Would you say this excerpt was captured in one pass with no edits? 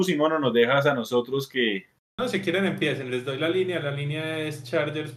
yes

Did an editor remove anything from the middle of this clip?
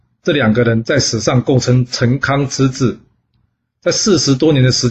no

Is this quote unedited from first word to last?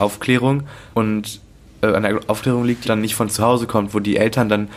no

